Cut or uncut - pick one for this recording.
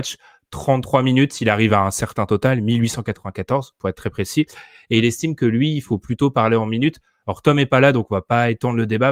uncut